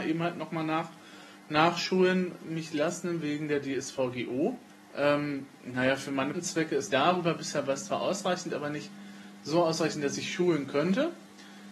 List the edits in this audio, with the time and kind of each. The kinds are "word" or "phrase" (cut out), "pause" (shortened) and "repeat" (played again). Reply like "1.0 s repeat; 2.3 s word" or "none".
4.7 s pause; 6.3 s word; 6.9 s phrase